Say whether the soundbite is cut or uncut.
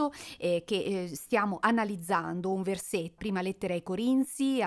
cut